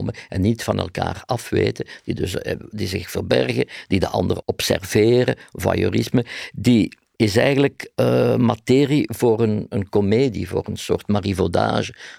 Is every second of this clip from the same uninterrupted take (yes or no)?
yes